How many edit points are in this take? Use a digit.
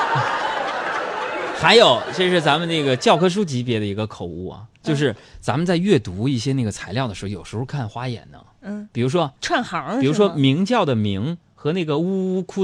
1